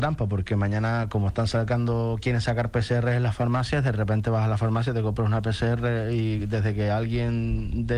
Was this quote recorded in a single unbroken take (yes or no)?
yes